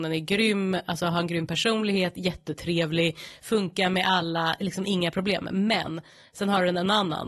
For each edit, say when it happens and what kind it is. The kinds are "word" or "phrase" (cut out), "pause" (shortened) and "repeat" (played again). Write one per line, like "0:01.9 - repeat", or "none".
none